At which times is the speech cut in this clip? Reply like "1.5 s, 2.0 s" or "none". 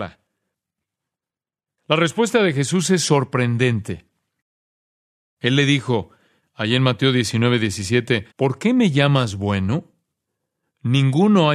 8.3 s